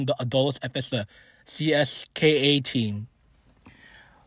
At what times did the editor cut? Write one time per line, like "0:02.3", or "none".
0:00.9